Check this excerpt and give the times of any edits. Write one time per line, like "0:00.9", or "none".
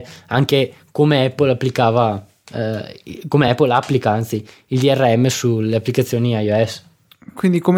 none

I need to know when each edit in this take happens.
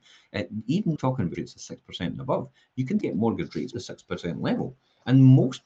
0:01.0
0:01.3
0:03.0
0:03.7

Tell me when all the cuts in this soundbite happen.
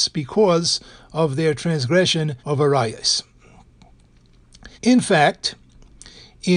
0:02.4
0:04.7

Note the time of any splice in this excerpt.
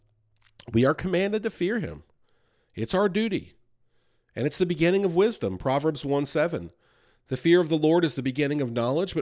none

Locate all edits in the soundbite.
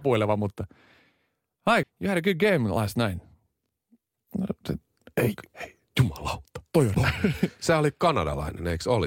0:01.8
0:05.5
0:06.9

